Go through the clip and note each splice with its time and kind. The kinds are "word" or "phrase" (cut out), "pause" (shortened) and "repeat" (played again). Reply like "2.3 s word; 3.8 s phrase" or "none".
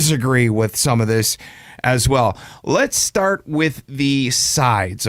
none